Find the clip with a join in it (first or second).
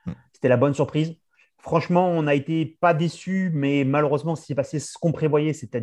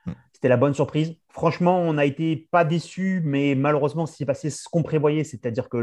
second